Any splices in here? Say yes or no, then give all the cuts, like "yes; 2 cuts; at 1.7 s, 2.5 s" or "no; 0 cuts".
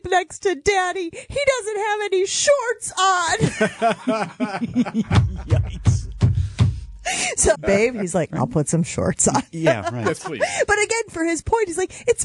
yes; 1 cut; at 7.5 s